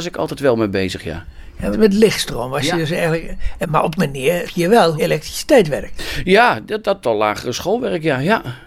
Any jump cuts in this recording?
yes; 6 cuts; at 1.7 s, 3.6 s, 4.0 s, 4.4 s, 5.0 s, 7.0 s

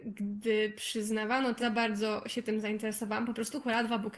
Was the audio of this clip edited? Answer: yes; 1 cut; at 1.6 s

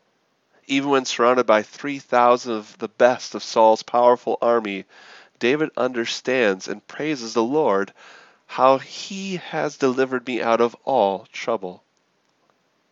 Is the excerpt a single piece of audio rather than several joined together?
yes; 0 cuts

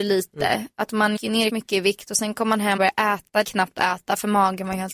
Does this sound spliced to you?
yes; 4 cuts; at 1.2 s, 1.5 s, 2.8 s, 3.4 s

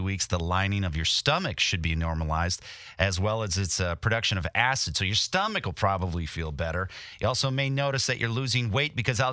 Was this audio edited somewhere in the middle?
no; 0 cuts

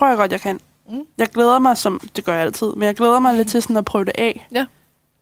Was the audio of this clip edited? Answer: no; 0 cuts

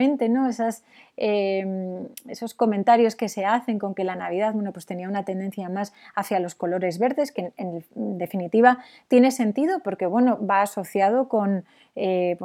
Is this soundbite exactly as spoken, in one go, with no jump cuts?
yes; 0 cuts

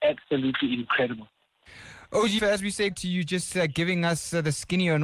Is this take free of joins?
no; 2 cuts; at 2.4 s, 2.9 s

